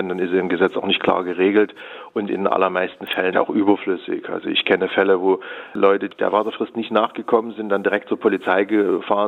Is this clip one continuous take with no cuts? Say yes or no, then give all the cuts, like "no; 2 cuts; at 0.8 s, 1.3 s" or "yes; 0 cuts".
no; 1 cut; at 3.3 s